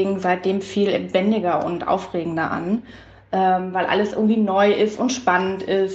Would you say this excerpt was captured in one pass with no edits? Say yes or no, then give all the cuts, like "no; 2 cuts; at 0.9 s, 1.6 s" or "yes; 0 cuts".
yes; 0 cuts